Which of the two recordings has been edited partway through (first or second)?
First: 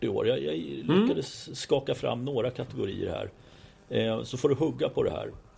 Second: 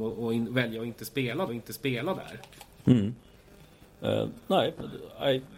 second